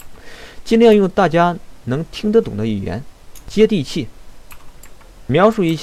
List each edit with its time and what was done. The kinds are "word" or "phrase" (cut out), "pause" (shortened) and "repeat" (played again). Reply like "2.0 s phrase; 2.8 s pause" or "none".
none